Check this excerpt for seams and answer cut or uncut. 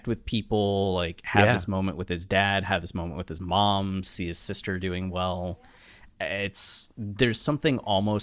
cut